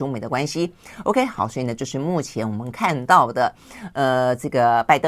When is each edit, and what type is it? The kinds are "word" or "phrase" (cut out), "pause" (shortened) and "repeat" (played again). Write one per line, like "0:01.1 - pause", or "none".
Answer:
none